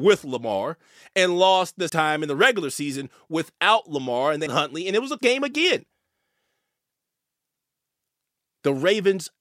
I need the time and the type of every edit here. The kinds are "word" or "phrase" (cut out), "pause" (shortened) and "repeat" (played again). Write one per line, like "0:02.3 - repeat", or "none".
0:01.9 - word
0:04.5 - word
0:05.2 - word